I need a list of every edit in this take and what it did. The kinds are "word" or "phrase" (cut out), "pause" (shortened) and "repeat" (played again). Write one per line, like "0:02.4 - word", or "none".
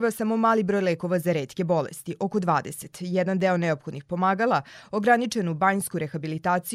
none